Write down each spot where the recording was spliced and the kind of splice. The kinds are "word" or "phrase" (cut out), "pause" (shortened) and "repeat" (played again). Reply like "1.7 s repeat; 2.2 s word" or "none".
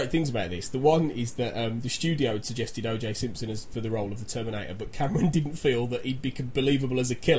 none